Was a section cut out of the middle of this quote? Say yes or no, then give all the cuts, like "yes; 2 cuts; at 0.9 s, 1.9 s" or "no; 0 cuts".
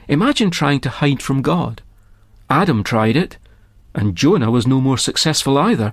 no; 0 cuts